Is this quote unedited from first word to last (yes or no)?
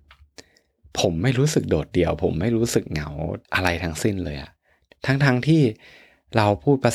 no